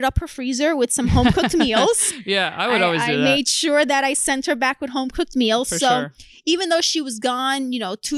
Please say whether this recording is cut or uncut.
uncut